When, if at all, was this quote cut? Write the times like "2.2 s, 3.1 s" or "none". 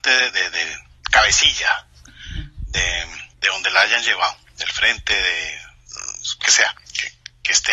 3.3 s, 6.4 s